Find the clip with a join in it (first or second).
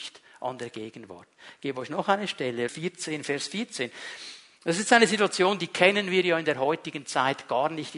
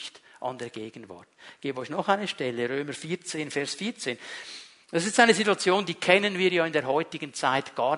first